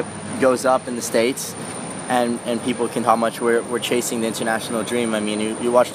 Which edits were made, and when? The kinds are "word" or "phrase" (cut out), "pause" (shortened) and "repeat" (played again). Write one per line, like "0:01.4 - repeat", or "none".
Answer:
0:03.0 - word